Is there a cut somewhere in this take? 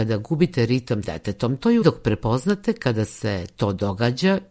yes; 2 cuts; at 1.0 s, 1.8 s

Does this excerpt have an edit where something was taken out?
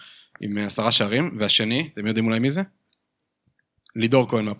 no; 0 cuts

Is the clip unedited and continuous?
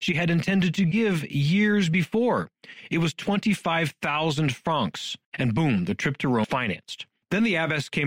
no; 2 cuts; at 5.2 s, 6.4 s

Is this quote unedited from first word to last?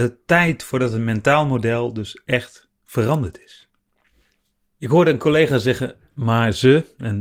yes; 0 cuts

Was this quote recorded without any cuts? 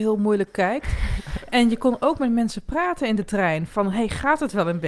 yes; 0 cuts

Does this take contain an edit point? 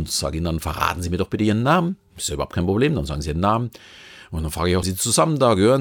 yes; 1 cut; at 4.8 s

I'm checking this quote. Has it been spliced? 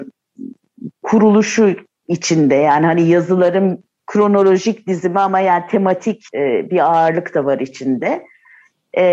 yes; 1 cut; at 6.3 s

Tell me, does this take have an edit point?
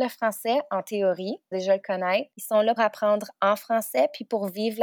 yes; 3 cuts; at 1.5 s, 2.3 s, 2.8 s

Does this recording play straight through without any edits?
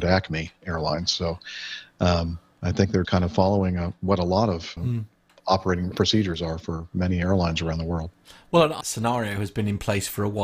no; 4 cuts; at 3.0 s, 4.8 s, 5.9 s, 8.8 s

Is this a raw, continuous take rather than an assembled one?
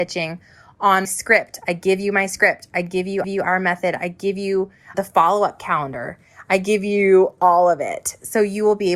no; 3 cuts; at 1.0 s, 3.2 s, 4.9 s

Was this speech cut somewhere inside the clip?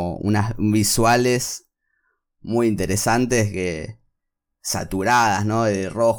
no; 0 cuts

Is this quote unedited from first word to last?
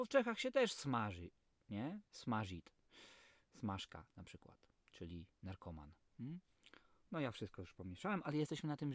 yes; 0 cuts

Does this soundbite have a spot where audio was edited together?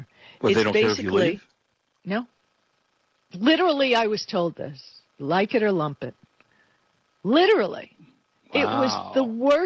no; 0 cuts

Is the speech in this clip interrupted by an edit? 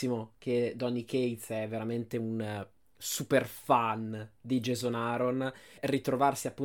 no; 0 cuts

